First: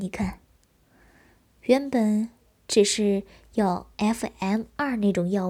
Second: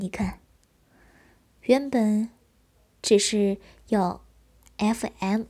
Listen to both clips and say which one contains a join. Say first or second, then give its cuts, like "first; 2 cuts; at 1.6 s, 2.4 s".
first; 2 cuts; at 2.5 s, 3.9 s